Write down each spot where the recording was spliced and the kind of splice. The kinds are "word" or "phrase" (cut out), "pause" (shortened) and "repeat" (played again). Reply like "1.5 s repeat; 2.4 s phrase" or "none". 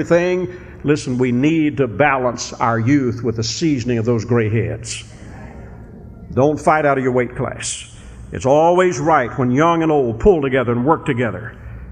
none